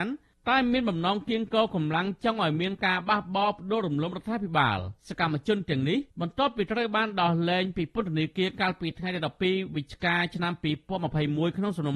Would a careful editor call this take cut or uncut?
cut